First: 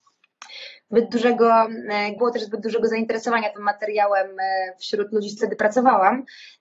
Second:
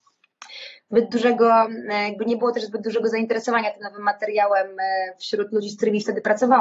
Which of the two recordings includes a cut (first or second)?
first